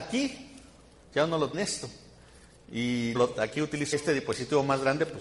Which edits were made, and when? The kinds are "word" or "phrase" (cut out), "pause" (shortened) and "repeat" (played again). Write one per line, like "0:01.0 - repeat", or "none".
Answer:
0:01.5 - word
0:03.1 - word
0:03.9 - word